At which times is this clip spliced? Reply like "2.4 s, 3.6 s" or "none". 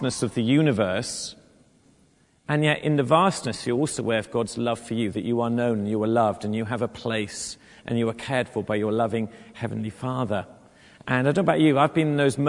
none